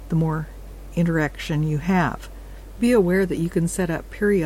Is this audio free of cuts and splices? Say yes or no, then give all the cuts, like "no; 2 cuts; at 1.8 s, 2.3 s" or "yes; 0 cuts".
yes; 0 cuts